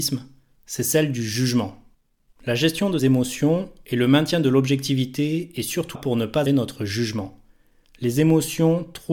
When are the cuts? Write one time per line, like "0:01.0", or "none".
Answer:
0:03.0
0:06.0
0:06.5